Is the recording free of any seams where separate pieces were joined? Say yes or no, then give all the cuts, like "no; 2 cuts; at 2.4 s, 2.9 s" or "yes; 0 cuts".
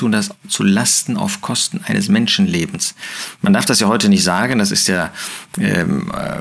yes; 0 cuts